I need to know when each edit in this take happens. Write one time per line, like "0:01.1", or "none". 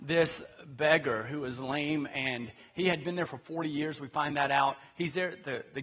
none